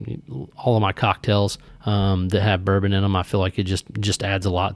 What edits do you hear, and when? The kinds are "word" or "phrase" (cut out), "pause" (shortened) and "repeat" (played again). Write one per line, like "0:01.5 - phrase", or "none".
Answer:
none